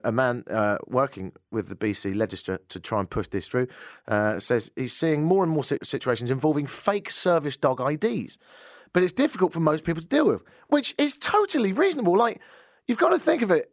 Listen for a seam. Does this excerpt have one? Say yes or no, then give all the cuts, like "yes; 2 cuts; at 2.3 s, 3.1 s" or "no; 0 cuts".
no; 0 cuts